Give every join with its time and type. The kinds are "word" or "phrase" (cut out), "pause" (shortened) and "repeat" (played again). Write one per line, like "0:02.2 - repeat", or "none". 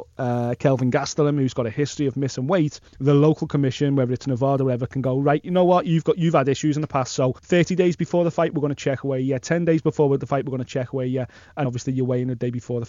0:02.9 - pause
0:07.4 - pause
0:11.6 - word